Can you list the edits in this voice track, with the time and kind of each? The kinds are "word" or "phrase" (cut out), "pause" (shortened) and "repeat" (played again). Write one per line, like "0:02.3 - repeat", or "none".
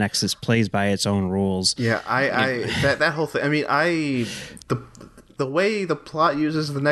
0:04.6 - pause

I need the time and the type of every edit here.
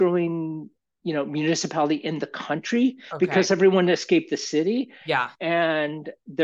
none

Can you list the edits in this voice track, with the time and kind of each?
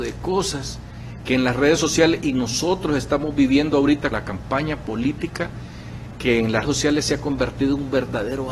0:04.1 - word
0:06.1 - word
0:06.6 - word

